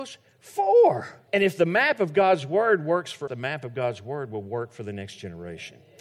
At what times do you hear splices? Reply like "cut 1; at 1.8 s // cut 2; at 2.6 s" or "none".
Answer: cut 1; at 1.3 s // cut 2; at 3.3 s